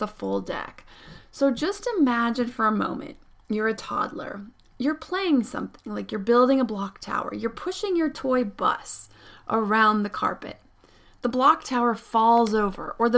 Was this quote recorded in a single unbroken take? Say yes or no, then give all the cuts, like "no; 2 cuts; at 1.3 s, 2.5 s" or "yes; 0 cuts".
yes; 0 cuts